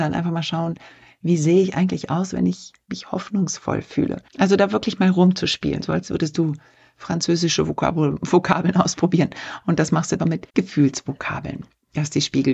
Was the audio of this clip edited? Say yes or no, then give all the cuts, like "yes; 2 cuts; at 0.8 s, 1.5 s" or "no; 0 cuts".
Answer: yes; 3 cuts; at 4.3 s, 10.2 s, 10.5 s